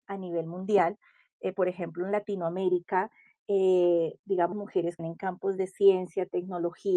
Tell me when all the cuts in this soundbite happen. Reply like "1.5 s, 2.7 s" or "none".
4.5 s, 5.0 s